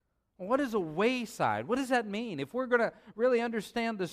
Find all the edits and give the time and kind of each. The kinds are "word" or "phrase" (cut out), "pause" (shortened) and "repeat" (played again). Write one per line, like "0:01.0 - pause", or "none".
none